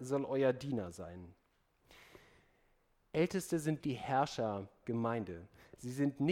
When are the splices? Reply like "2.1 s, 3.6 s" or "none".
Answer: 3.8 s, 4.8 s